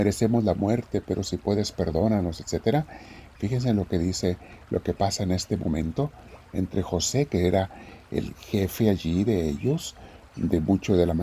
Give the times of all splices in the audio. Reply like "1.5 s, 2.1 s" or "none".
none